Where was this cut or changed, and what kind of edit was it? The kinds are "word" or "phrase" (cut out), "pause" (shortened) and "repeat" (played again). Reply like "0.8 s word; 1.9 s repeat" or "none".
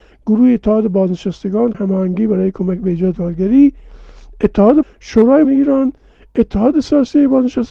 1.7 s word; 3.2 s word; 4.8 s word; 5.4 s word

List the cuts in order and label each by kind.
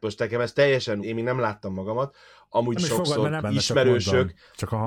1.0 s word; 2.8 s word; 3.4 s word

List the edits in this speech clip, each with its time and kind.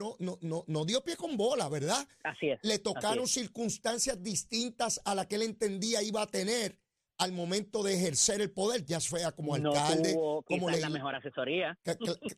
none

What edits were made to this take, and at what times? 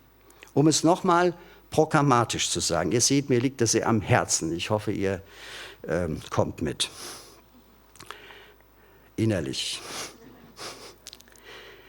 none

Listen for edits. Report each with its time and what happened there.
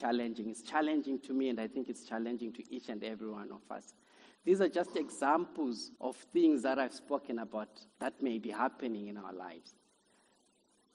6.0 s pause; 7.9 s pause

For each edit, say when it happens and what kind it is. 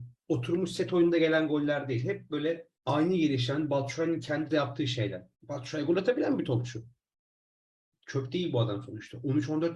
2.7 s pause; 4.5 s word; 5.3 s pause

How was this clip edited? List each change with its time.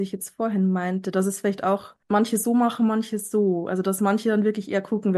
2.0 s pause

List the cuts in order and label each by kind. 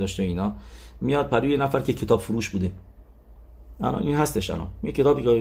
none

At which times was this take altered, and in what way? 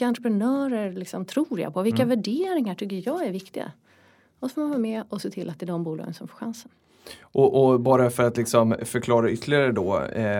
none

